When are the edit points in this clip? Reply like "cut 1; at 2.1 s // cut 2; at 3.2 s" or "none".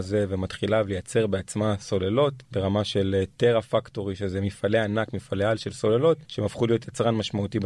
cut 1; at 2.4 s // cut 2; at 6.2 s